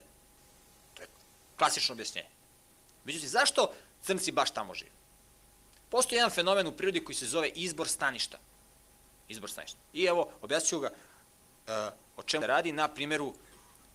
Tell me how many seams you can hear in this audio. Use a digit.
1